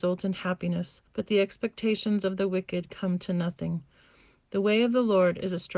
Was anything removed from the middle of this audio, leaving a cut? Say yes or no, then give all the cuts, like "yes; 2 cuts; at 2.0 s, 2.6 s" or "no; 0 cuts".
yes; 1 cut; at 1.1 s